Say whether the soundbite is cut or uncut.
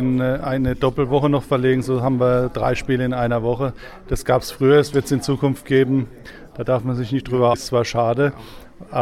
cut